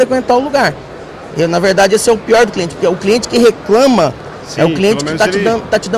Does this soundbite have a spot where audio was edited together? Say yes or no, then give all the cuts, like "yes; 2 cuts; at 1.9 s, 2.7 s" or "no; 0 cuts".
no; 0 cuts